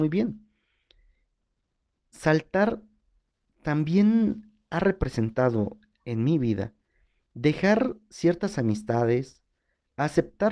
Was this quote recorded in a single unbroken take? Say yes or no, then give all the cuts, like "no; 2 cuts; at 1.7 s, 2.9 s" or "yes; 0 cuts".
yes; 0 cuts